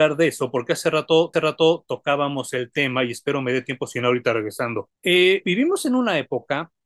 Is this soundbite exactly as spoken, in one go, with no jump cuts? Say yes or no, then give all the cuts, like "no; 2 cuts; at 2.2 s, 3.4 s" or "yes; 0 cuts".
no; 2 cuts; at 1.3 s, 5.0 s